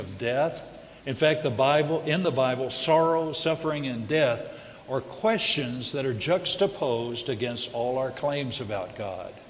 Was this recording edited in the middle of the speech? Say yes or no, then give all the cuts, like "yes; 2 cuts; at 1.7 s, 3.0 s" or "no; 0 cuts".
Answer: yes; 1 cut; at 1.0 s